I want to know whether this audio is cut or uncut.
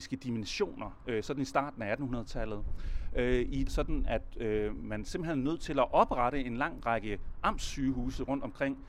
cut